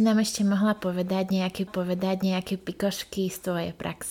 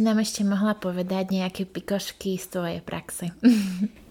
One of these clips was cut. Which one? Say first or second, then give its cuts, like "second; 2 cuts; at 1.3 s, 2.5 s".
first; 1 cut; at 1.7 s